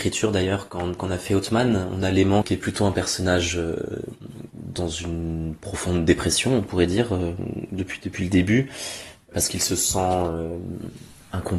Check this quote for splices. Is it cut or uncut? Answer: uncut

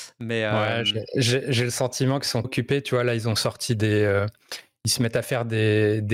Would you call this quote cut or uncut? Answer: cut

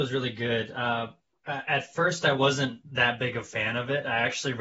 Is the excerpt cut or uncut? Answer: uncut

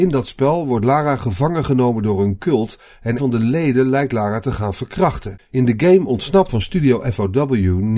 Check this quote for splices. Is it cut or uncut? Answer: cut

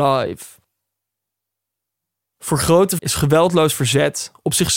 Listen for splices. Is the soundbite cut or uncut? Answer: cut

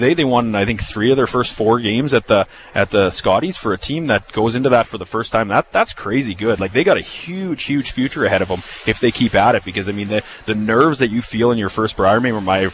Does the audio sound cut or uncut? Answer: uncut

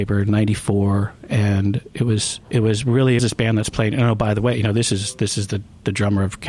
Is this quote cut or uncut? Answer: cut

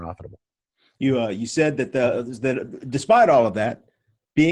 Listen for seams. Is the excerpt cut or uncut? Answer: uncut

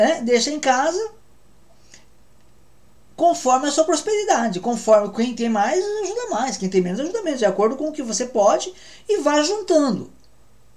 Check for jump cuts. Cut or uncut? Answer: uncut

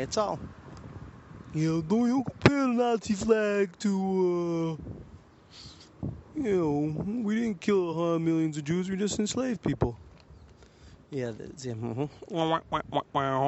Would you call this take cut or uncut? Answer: uncut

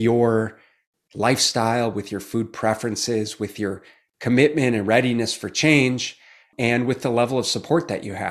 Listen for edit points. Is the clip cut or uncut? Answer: uncut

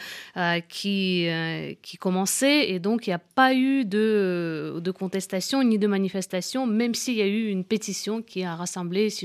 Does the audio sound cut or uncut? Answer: uncut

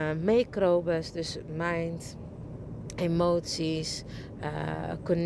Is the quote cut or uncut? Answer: uncut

